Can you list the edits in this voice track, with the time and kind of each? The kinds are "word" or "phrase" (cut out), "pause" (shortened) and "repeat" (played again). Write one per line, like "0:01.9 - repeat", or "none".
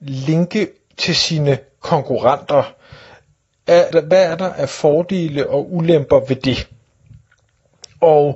0:03.9 - word